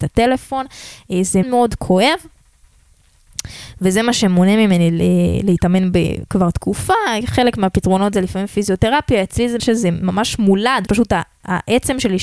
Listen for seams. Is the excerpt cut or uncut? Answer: cut